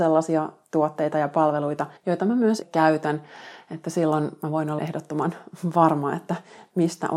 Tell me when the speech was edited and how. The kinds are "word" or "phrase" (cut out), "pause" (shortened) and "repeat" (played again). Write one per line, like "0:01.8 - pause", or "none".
0:02.0 - pause
0:02.6 - word
0:04.8 - word